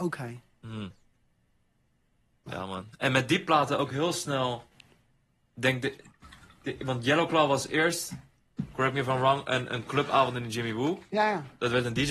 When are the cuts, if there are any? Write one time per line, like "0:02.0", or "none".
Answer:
none